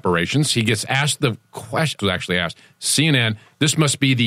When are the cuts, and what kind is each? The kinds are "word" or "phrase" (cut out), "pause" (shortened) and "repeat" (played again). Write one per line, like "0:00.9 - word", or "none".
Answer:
0:02.0 - phrase

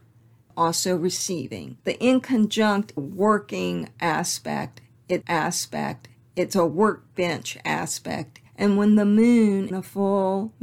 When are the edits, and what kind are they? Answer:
0:01.8 - pause
0:03.0 - phrase
0:05.2 - repeat
0:08.5 - pause
0:09.7 - word

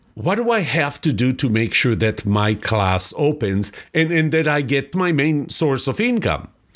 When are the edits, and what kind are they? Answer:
0:04.9 - phrase

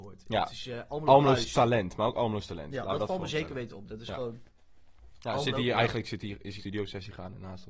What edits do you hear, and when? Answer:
0:06.6 - word

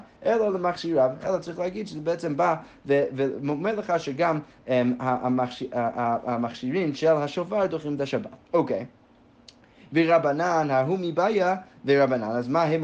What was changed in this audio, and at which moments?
0:08.4 - pause

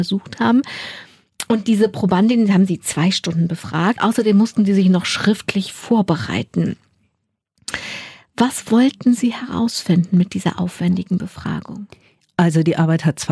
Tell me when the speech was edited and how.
0:04.0 - word

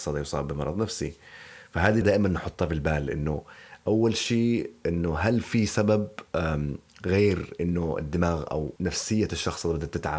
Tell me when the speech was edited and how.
0:02.0 - word
0:08.8 - phrase

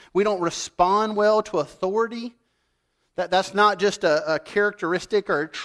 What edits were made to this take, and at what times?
none

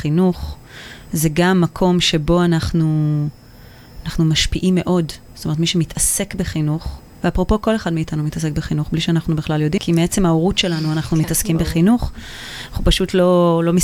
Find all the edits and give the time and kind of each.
0:09.8 - word

